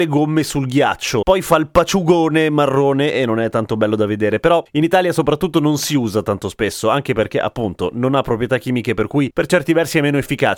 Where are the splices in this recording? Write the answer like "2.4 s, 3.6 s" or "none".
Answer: none

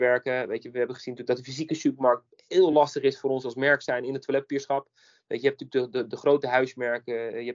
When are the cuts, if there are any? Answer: none

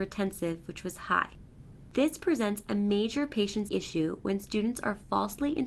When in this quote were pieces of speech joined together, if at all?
3.7 s

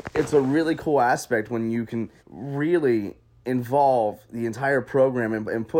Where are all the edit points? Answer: 2.2 s

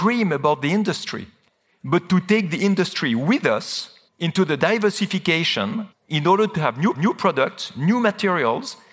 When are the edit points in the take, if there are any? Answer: 1.5 s, 4.1 s, 5.9 s, 6.9 s

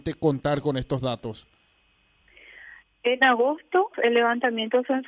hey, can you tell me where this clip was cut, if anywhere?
3.9 s

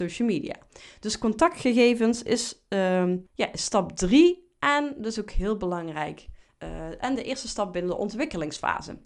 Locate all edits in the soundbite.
3.3 s

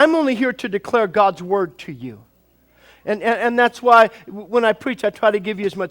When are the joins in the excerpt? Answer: none

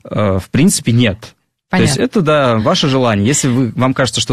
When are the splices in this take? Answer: none

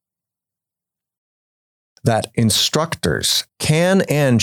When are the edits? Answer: 3.5 s

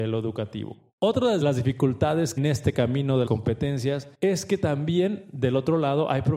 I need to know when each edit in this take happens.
1.4 s, 2.4 s, 3.3 s, 4.1 s

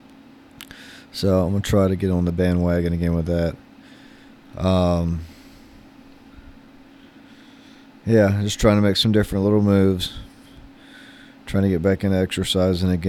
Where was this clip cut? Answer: none

